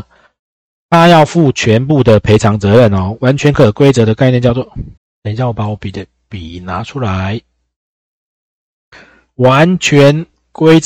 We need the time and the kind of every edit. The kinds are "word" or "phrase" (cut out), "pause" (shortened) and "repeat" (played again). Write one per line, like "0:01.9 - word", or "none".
0:05.0 - pause

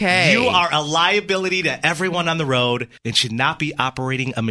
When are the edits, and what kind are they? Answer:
0:03.0 - pause

